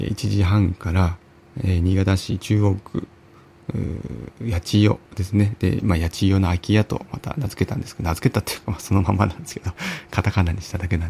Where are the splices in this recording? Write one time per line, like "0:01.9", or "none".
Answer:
0:05.1
0:09.8